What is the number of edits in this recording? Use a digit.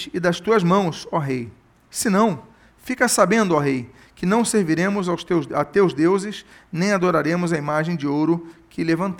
0